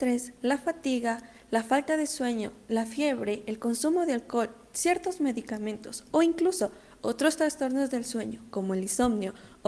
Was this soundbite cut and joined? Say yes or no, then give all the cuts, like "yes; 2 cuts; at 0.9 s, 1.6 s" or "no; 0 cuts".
no; 0 cuts